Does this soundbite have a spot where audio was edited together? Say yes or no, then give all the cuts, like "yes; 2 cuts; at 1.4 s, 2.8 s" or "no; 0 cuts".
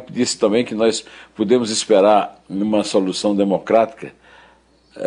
no; 0 cuts